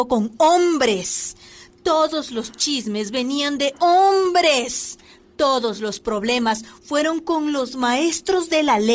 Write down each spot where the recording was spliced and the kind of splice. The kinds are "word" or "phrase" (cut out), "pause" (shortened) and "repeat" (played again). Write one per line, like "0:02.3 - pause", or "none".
none